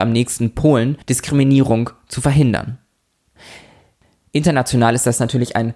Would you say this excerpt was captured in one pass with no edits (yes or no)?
no